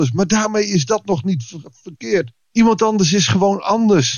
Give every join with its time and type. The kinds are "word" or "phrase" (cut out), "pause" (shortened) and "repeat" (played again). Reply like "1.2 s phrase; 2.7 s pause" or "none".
2.4 s pause